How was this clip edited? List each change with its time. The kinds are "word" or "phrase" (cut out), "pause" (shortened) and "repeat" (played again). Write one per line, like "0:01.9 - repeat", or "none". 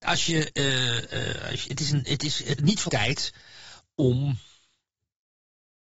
0:02.6 - word
0:02.9 - word